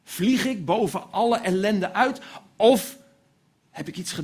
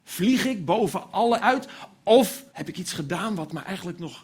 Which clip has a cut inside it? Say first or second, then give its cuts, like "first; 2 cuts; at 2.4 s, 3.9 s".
second; 2 cuts; at 1.4 s, 2.5 s